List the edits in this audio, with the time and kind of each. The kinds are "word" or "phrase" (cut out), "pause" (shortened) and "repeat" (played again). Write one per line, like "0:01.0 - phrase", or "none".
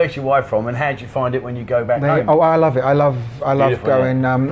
none